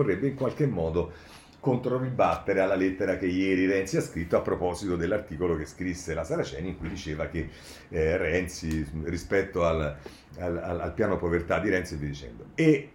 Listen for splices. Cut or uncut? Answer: uncut